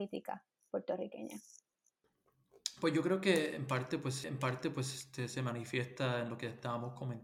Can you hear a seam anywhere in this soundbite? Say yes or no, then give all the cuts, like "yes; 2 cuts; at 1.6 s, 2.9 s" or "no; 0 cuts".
yes; 1 cut; at 4.2 s